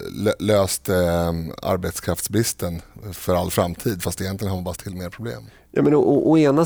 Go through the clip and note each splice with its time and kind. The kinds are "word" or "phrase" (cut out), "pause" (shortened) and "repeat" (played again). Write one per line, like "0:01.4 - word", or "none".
0:04.8 - word